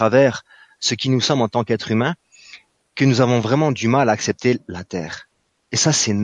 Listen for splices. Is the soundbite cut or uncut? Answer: uncut